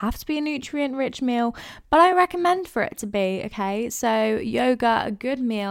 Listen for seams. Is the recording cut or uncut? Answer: uncut